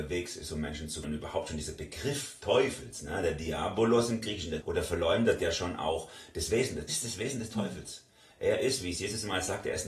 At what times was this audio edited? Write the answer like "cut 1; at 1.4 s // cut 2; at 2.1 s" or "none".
cut 1; at 1.0 s // cut 2; at 2.4 s // cut 3; at 4.6 s // cut 4; at 5.4 s // cut 5; at 6.9 s